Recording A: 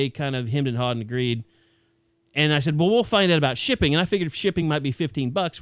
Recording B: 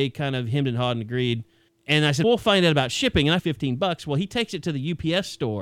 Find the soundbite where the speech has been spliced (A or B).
B